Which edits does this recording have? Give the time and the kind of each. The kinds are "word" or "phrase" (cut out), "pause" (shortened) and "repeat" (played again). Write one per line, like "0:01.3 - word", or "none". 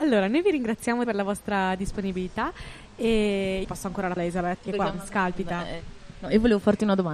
0:01.0 - word
0:03.6 - word
0:04.2 - word
0:04.6 - word

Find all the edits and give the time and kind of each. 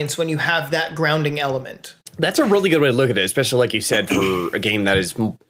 none

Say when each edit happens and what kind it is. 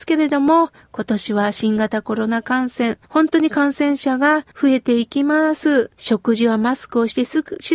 0:03.0 - pause
0:04.5 - pause
0:05.9 - pause

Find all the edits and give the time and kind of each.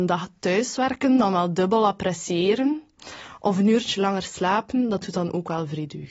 none

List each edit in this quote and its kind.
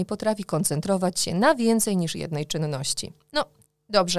none

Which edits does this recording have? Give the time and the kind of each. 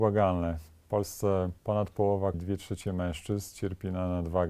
0:01.6 - pause
0:02.3 - word

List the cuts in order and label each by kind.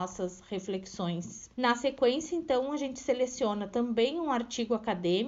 0:01.5 - pause

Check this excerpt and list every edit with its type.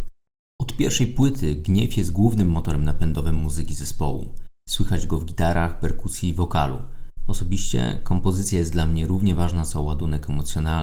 none

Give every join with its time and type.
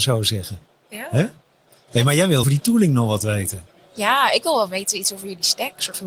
0:02.4 - word

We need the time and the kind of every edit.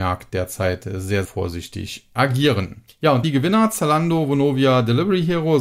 0:01.2 - word
0:02.9 - pause
0:03.2 - word

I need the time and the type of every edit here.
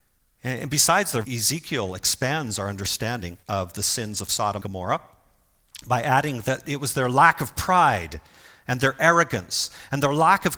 0:01.2 - word
0:03.4 - pause
0:04.6 - word

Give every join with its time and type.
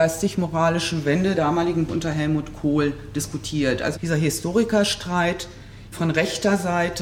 0:01.3 - word
0:01.9 - word
0:03.9 - word
0:05.9 - word

